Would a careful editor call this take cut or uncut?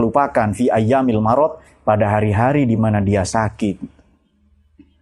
uncut